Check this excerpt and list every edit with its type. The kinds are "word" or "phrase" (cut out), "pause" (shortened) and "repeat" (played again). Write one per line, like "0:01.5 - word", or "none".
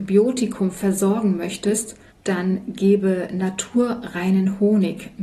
0:02.1 - pause